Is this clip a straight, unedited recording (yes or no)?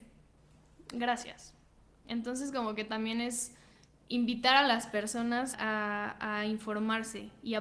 no